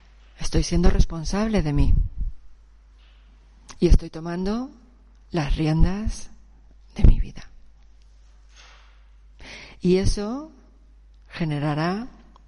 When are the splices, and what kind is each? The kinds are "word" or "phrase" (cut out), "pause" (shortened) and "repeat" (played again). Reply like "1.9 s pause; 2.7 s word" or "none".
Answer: none